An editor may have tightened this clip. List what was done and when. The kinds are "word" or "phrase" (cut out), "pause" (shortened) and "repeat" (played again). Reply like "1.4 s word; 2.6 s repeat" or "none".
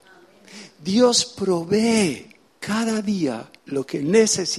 2.5 s pause; 3.6 s pause